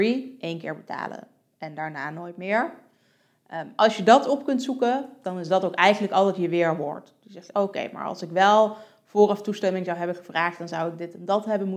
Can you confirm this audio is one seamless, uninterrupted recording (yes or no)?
yes